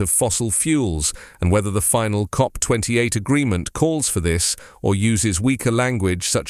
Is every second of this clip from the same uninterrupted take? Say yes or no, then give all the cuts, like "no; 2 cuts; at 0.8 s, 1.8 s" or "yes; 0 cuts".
yes; 0 cuts